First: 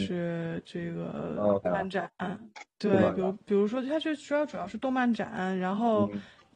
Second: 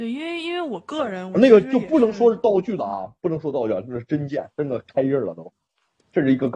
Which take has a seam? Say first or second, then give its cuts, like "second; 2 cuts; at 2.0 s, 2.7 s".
first; 1 cut; at 1.6 s